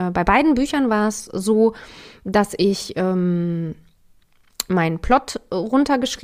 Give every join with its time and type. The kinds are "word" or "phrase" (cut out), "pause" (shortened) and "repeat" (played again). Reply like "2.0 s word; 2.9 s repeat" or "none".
none